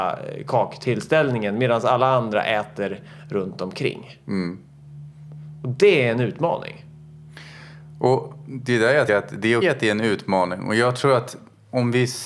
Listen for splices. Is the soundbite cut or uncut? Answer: cut